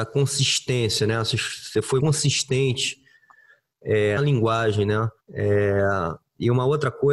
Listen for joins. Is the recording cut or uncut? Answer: cut